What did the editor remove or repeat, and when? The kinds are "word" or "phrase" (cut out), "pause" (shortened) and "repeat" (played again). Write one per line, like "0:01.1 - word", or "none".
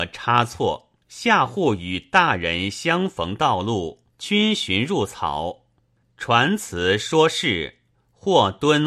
0:01.0 - pause
0:04.1 - pause
0:06.0 - pause